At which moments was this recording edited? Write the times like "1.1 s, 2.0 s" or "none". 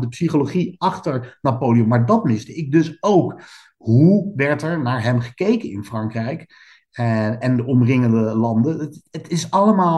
none

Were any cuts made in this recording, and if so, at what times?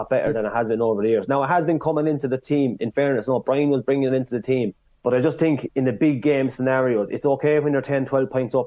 5.0 s

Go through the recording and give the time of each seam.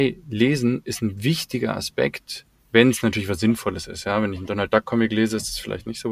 2.6 s

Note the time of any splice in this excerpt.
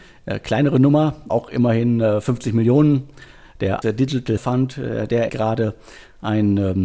1.3 s, 3.8 s, 4.4 s, 5.3 s

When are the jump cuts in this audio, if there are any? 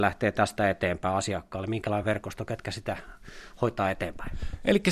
none

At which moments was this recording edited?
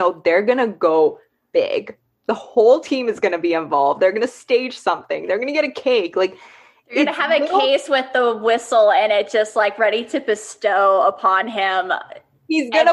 none

